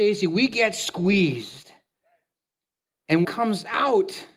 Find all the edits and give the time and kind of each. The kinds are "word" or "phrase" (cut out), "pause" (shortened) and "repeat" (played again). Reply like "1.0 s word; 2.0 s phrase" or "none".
3.2 s word